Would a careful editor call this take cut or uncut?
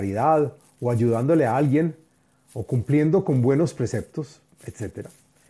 uncut